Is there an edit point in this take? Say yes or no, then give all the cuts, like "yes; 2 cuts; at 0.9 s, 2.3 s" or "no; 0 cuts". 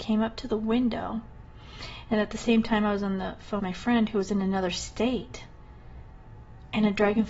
yes; 1 cut; at 3.6 s